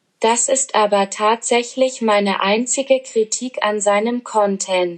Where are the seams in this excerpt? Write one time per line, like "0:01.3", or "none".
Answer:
none